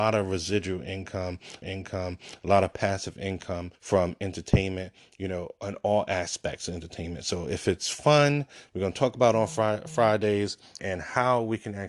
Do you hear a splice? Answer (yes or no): yes